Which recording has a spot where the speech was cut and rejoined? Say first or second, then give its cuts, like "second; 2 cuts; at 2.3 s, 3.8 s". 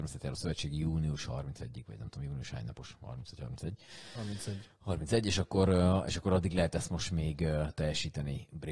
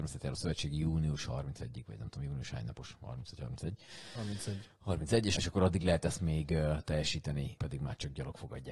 second; 3 cuts; at 5.3 s, 6.2 s, 7.6 s